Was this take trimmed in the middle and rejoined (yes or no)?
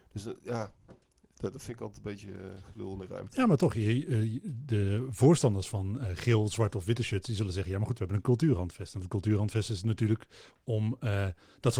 no